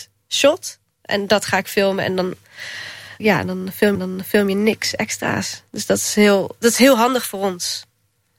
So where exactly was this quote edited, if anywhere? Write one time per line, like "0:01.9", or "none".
0:03.2
0:03.9